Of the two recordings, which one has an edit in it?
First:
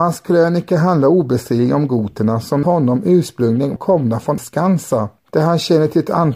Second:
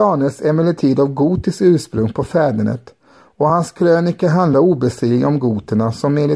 first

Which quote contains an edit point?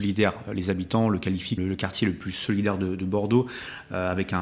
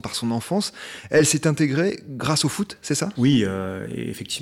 first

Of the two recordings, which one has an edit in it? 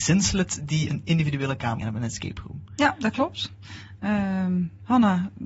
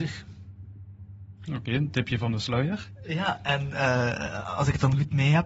first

